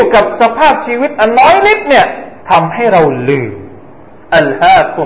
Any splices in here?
yes; 1 cut; at 2.4 s

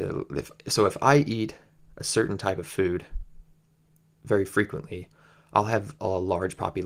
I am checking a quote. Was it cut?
no; 0 cuts

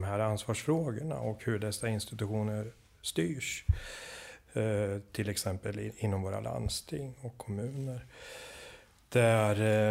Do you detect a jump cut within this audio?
no; 0 cuts

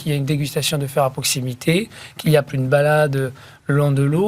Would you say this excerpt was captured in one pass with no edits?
no; 1 cut; at 2.5 s

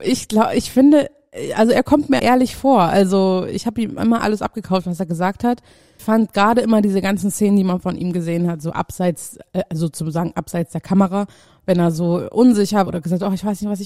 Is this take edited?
yes; 3 cuts; at 2.2 s, 6.0 s, 12.9 s

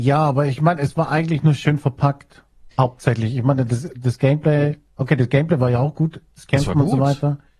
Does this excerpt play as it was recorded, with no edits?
no; 2 cuts; at 2.7 s, 6.3 s

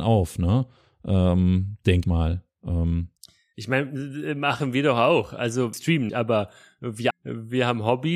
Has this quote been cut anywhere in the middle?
yes; 4 cuts; at 2.0 s, 5.7 s, 6.1 s, 7.1 s

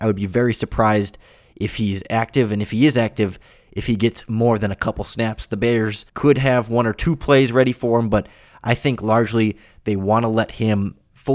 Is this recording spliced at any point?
yes; 1 cut; at 6.1 s

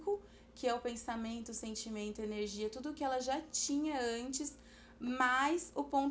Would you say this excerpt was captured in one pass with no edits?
yes; 0 cuts

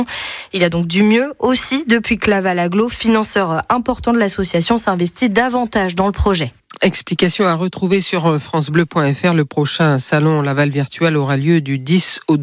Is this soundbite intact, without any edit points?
yes; 0 cuts

